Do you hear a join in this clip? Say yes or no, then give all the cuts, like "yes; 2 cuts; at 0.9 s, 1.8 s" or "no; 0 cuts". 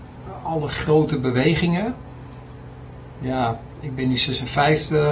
no; 0 cuts